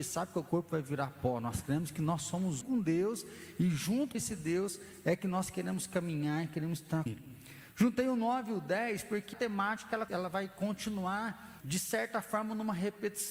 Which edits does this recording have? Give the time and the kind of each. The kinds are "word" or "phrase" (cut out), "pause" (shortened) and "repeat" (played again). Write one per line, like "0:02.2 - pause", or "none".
0:02.6 - word
0:04.1 - word
0:07.1 - word
0:09.3 - word
0:10.1 - word
0:11.6 - word